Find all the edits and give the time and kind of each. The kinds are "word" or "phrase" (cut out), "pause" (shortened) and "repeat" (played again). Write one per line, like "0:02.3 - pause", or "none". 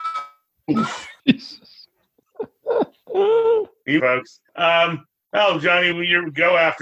0:01.2 - pause
0:02.2 - pause
0:04.0 - phrase
0:04.5 - pause
0:05.9 - word